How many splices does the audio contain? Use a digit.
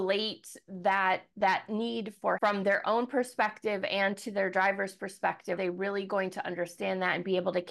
2